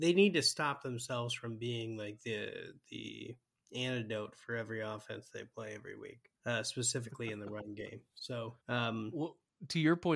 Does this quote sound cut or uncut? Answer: cut